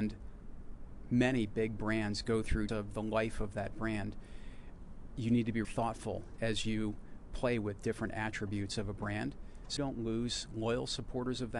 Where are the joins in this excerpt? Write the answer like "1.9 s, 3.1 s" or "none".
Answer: 2.7 s, 5.6 s, 9.8 s